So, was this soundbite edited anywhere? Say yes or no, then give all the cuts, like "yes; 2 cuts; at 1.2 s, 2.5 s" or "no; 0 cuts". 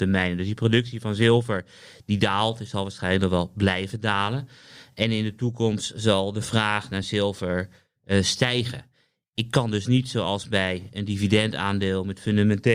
no; 0 cuts